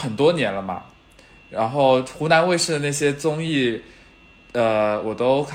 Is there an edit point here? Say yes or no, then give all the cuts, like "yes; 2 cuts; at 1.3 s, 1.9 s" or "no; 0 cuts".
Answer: no; 0 cuts